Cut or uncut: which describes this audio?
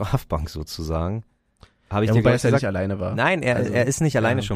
uncut